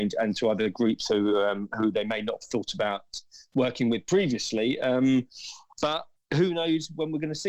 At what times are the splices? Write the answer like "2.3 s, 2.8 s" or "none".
none